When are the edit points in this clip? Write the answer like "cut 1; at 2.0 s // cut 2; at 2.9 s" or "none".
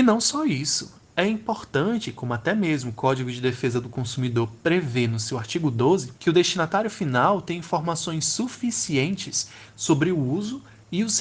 cut 1; at 6.2 s